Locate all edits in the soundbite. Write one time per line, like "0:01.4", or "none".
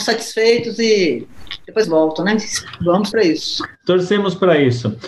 0:01.8
0:03.1